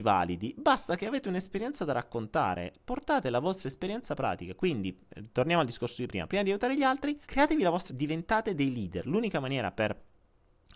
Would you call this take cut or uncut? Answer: cut